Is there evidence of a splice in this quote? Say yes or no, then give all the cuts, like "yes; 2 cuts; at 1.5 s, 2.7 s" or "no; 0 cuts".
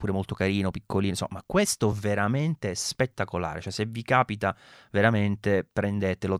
no; 0 cuts